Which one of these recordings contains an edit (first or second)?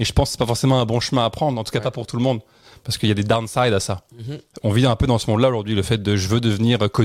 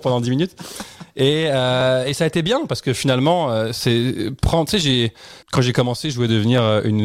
second